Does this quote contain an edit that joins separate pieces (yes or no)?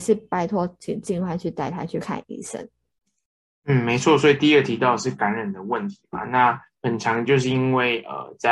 no